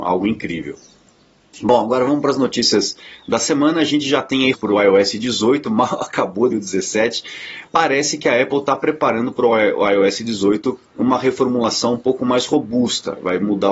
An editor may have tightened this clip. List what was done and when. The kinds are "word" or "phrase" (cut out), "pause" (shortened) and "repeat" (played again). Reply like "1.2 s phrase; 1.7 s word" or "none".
4.5 s word; 6.5 s word; 7.7 s word